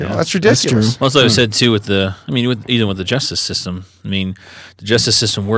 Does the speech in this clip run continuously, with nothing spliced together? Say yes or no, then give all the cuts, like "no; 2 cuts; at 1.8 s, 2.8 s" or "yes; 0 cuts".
yes; 0 cuts